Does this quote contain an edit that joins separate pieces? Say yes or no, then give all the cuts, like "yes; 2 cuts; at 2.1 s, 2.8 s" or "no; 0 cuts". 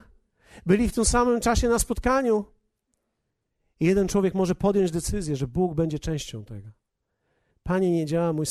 no; 0 cuts